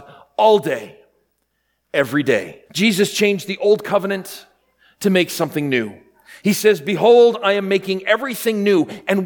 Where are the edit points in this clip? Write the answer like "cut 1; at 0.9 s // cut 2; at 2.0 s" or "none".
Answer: cut 1; at 2.7 s